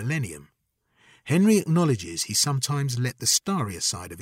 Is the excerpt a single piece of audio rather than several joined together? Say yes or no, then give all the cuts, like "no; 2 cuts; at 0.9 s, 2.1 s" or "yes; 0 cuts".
yes; 0 cuts